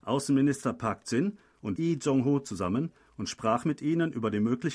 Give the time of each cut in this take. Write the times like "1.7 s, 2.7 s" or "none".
1.8 s